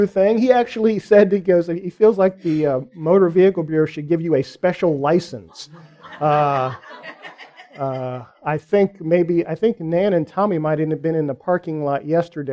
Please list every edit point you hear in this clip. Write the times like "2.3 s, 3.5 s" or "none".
none

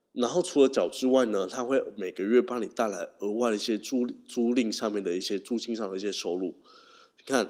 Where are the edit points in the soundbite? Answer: none

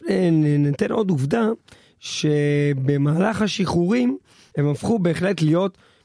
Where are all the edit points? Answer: none

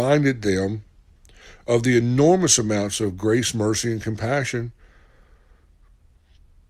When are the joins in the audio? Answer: none

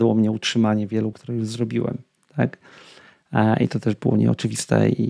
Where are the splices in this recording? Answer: 1.1 s

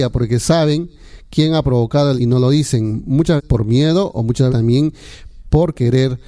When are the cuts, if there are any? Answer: 2.2 s, 3.4 s, 4.5 s

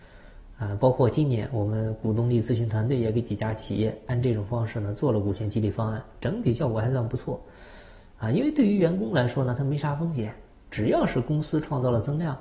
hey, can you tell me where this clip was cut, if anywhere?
10.7 s

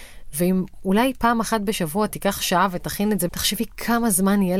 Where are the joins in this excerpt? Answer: 3.3 s

